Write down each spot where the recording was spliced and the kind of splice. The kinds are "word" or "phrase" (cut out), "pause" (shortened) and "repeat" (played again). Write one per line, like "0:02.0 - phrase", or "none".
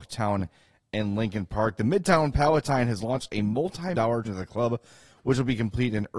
0:03.9 - word
0:04.2 - word